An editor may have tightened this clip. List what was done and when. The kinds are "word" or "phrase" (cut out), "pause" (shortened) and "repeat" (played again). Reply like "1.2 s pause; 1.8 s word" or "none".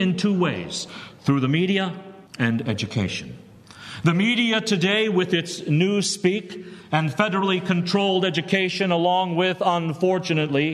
2.3 s pause